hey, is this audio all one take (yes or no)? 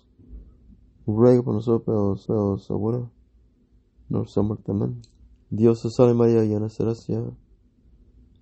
no